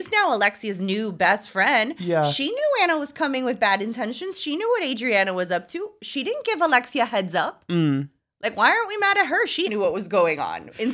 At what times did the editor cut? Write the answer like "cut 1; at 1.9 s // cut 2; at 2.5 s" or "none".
cut 1; at 9.7 s